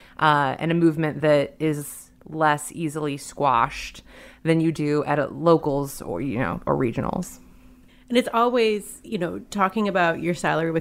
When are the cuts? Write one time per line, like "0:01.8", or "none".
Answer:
none